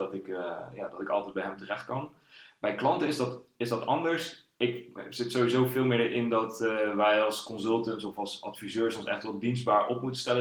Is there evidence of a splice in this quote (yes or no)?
no